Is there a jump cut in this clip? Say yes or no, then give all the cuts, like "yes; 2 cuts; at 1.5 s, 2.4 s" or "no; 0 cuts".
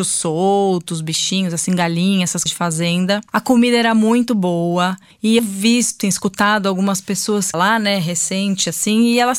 yes; 5 cuts; at 2.5 s, 3.3 s, 5.4 s, 6.0 s, 7.5 s